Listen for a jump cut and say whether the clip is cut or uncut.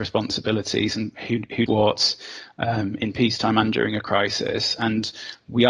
cut